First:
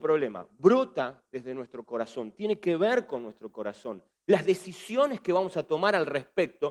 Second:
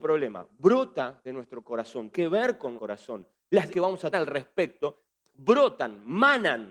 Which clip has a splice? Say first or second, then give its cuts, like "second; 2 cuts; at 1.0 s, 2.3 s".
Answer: second; 5 cuts; at 1.2 s, 2.1 s, 2.8 s, 3.7 s, 4.1 s